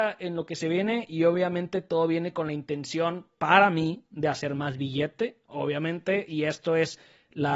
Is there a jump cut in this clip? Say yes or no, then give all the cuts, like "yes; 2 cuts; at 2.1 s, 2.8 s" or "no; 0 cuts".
no; 0 cuts